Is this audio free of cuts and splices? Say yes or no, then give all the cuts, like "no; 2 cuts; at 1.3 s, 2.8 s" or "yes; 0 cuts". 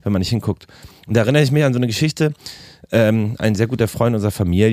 yes; 0 cuts